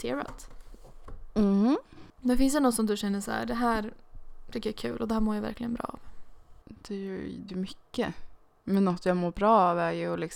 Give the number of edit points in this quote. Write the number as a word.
three